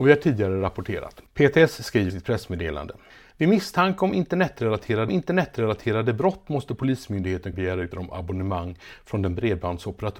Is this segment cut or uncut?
cut